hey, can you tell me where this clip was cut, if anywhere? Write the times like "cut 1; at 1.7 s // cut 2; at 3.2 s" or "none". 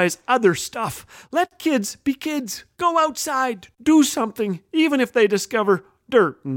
none